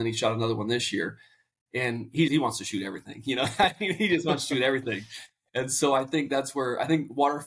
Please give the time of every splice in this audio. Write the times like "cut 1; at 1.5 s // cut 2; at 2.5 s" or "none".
cut 1; at 2.3 s